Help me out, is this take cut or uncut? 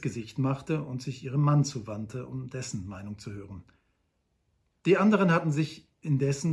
uncut